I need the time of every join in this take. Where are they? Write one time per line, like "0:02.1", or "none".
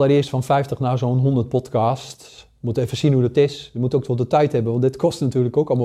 none